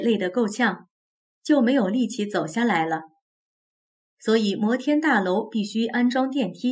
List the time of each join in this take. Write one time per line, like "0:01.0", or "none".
none